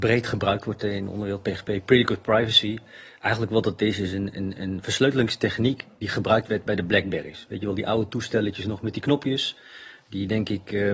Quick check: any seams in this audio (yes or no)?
no